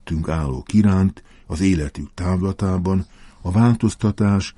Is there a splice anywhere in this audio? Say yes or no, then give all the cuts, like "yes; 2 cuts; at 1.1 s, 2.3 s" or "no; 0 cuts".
no; 0 cuts